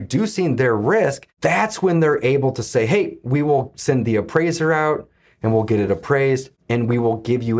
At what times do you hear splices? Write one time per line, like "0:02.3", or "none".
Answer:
none